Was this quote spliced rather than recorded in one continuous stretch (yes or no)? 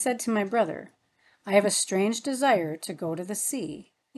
no